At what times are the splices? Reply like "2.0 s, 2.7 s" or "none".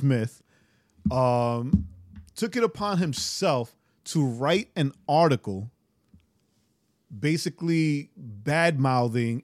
none